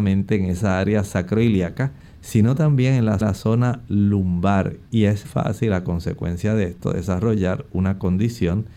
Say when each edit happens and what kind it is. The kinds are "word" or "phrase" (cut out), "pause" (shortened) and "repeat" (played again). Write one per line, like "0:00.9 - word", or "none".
0:02.0 - pause
0:03.2 - repeat
0:05.2 - word